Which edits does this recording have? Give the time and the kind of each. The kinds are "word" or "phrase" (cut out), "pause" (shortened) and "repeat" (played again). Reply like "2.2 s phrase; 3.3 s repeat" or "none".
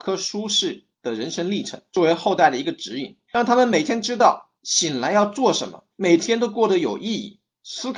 0.9 s pause; 1.9 s pause; 3.2 s pause; 4.6 s pause; 5.9 s pause